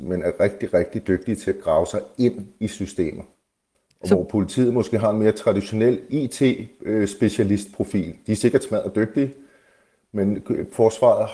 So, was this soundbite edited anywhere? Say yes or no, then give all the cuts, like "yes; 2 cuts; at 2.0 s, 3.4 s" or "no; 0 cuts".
yes; 1 cut; at 3.7 s